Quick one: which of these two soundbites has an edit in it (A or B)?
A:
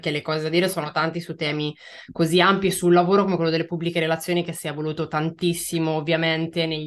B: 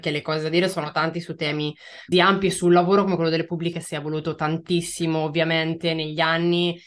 B